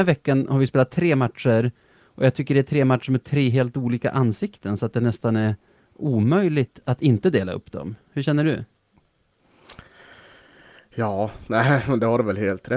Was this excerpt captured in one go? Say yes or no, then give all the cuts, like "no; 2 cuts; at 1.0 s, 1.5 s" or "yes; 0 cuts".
yes; 0 cuts